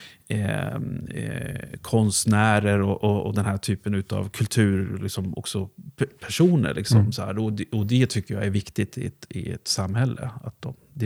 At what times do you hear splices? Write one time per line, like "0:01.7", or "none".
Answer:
none